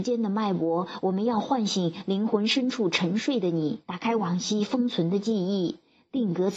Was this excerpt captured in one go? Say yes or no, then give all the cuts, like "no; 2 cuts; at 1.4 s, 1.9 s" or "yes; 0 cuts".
no; 1 cut; at 3.8 s